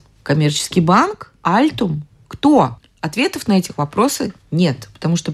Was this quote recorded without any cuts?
yes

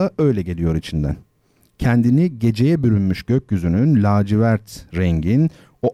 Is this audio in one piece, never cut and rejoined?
yes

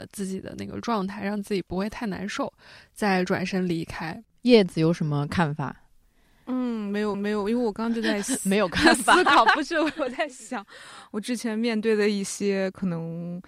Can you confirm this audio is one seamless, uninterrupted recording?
no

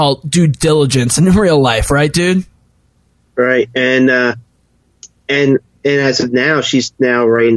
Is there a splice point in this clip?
no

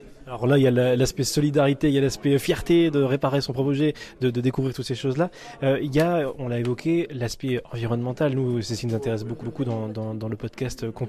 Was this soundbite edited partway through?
yes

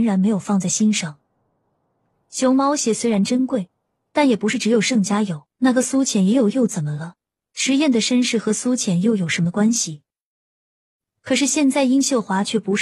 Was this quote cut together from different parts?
yes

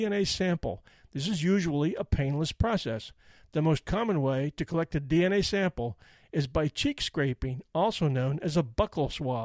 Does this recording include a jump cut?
no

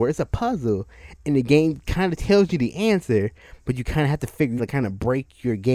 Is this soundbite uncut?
no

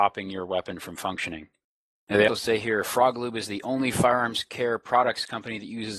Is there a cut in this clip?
yes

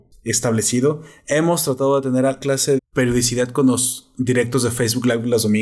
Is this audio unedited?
no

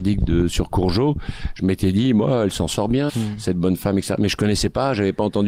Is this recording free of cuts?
no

